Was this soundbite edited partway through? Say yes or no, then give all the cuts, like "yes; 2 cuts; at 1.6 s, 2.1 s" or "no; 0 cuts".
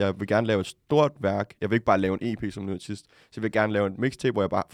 no; 0 cuts